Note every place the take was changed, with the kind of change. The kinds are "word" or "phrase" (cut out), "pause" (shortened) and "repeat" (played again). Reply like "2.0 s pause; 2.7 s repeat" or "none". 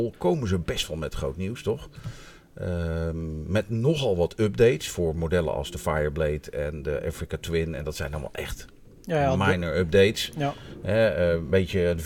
none